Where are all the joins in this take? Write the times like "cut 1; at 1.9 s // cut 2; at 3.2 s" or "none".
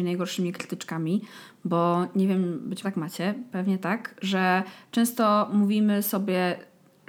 cut 1; at 2.8 s